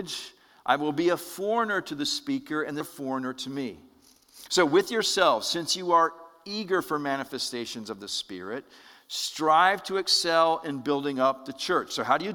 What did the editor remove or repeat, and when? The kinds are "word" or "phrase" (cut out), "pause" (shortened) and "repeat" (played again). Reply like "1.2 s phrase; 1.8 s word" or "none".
2.8 s word